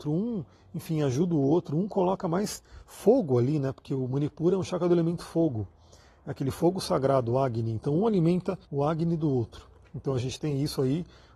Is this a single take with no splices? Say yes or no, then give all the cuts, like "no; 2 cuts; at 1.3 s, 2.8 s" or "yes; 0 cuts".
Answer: no; 1 cut; at 8.6 s